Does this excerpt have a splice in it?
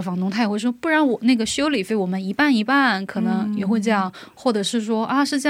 no; 0 cuts

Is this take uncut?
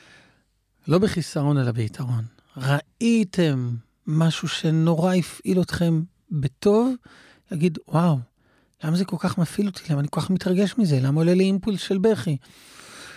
yes; 0 cuts

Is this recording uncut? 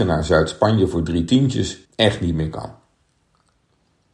no; 1 cut; at 1.9 s

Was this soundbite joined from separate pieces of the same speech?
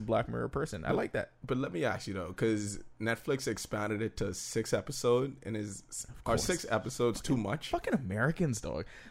no; 0 cuts

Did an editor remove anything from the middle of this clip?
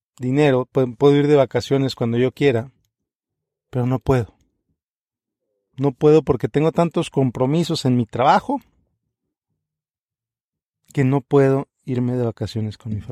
no; 0 cuts

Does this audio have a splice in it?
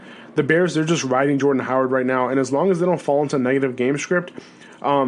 no; 0 cuts

